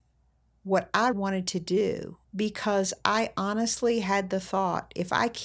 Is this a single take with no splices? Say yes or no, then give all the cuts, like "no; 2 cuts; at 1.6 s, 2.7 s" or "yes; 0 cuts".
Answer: no; 2 cuts; at 1.1 s, 2.2 s